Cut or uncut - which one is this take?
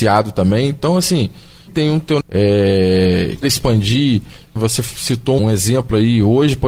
cut